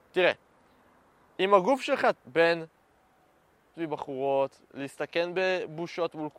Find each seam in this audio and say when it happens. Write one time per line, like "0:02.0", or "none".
0:02.1
0:03.7